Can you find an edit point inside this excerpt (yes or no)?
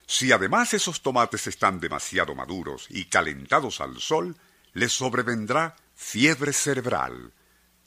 no